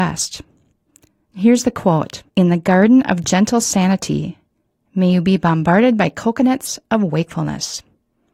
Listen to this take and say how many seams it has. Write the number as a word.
one